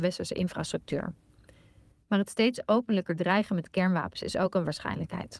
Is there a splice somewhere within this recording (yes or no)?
no